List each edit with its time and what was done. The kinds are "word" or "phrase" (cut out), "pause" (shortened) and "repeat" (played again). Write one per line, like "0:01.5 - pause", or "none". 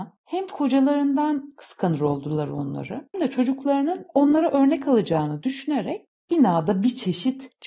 0:03.1 - word